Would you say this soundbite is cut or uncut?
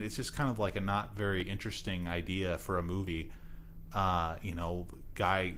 uncut